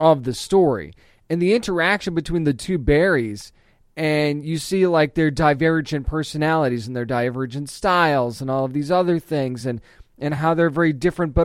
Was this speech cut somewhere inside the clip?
no; 0 cuts

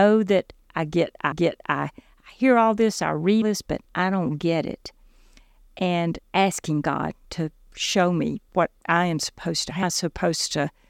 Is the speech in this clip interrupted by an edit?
yes; 7 cuts; at 1.3 s, 3.4 s, 3.8 s, 6.2 s, 7.2 s, 8.5 s, 9.8 s

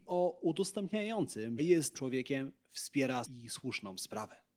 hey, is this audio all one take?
no; 3 cuts; at 1.6 s, 1.9 s, 3.2 s

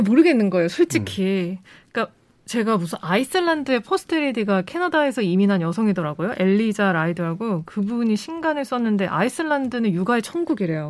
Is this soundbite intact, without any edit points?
yes; 0 cuts

